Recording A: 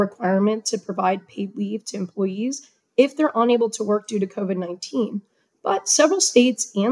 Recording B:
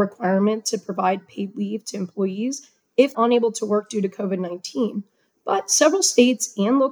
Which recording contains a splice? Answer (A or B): B